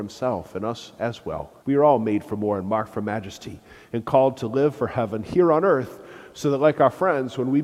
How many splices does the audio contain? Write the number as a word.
one